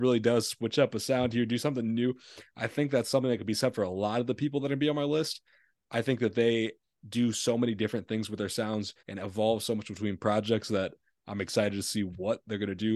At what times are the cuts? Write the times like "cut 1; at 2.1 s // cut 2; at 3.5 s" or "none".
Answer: cut 1; at 9.0 s